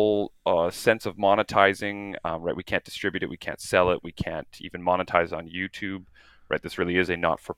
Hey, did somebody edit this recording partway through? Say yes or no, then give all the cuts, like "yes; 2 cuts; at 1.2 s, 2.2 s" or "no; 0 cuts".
no; 0 cuts